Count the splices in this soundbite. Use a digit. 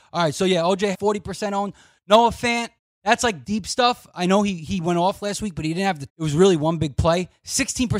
4